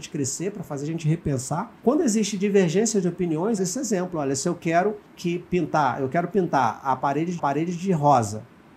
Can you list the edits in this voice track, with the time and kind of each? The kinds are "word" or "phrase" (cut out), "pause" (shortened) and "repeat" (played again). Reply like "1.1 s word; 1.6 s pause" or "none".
1.8 s pause; 3.6 s phrase; 5.0 s pause; 7.4 s repeat